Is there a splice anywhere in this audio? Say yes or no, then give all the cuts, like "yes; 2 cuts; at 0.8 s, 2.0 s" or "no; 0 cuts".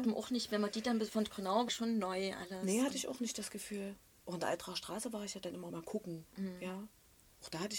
yes; 2 cuts; at 1.7 s, 5.7 s